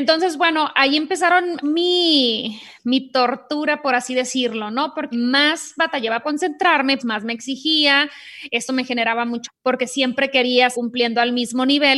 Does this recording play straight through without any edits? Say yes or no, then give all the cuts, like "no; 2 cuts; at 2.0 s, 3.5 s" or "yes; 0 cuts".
no; 6 cuts; at 1.6 s, 5.1 s, 6.2 s, 7.0 s, 9.4 s, 10.7 s